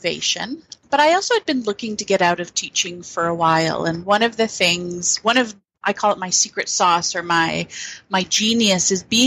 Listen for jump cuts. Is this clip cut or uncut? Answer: uncut